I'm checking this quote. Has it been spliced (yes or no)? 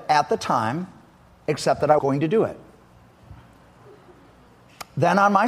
yes